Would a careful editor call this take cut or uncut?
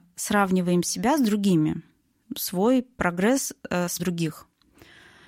cut